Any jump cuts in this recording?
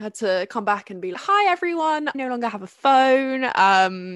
yes; 2 cuts; at 1.1 s, 2.1 s

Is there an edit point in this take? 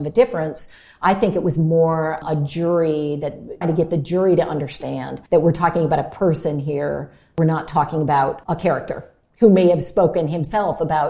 yes; 3 cuts; at 3.6 s, 5.3 s, 8.5 s

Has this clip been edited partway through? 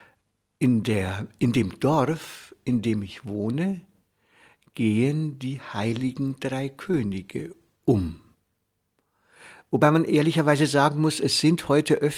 no; 0 cuts

